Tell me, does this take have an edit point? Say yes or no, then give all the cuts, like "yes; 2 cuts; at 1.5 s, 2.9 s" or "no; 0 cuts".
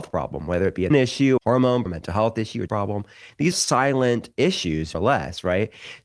yes; 6 cuts; at 0.9 s, 1.4 s, 1.9 s, 2.7 s, 3.5 s, 4.9 s